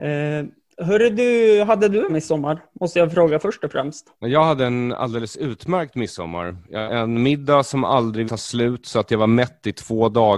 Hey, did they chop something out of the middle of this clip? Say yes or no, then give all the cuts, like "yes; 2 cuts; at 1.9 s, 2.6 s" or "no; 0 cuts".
yes; 4 cuts; at 2.1 s, 4.1 s, 6.9 s, 8.3 s